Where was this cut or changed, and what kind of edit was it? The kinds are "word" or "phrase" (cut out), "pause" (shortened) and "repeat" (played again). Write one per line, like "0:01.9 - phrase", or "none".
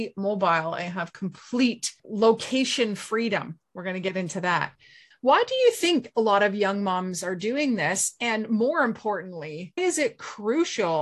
0:05.1 - word
0:09.8 - word